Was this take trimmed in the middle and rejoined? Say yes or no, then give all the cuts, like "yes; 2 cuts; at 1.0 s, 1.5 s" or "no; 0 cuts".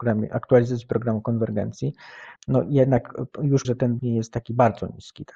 yes; 3 cuts; at 2.4 s, 3.6 s, 4.0 s